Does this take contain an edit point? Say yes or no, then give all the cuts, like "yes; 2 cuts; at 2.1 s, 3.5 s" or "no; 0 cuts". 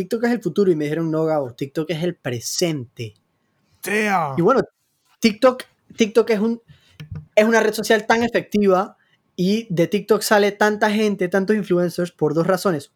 no; 0 cuts